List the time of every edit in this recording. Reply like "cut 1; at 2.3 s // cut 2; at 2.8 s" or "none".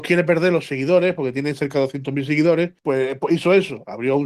cut 1; at 2.8 s